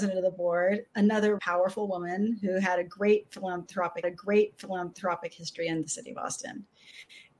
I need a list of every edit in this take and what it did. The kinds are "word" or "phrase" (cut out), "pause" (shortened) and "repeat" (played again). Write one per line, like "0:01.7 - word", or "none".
0:01.4 - word
0:04.0 - repeat